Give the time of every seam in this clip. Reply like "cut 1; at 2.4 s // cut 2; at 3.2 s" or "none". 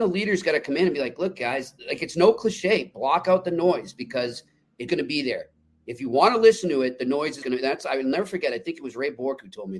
cut 1; at 1.8 s // cut 2; at 4.9 s // cut 3; at 7.4 s